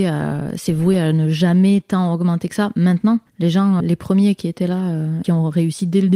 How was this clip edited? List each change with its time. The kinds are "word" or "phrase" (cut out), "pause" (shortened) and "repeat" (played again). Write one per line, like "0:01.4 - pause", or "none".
0:03.3 - pause
0:03.8 - word
0:05.2 - phrase